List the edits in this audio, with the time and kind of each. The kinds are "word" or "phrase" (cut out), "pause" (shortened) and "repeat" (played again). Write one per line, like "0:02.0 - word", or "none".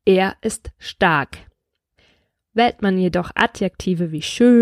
none

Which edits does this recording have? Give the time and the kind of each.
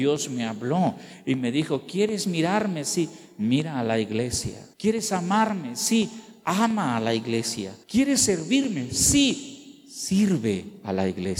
0:04.7 - pause
0:07.8 - pause

